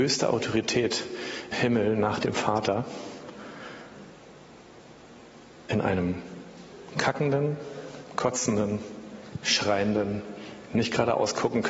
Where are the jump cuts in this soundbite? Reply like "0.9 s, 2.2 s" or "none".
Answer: 1.5 s